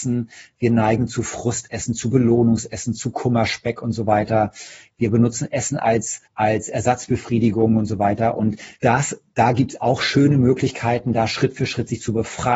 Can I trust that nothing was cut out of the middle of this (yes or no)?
no